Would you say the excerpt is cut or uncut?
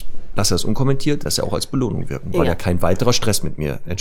cut